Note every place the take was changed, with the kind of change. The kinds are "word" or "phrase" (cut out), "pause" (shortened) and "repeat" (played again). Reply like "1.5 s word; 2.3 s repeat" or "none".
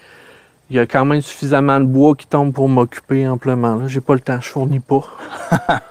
none